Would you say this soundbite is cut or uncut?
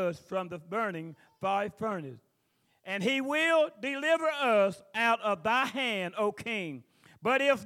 uncut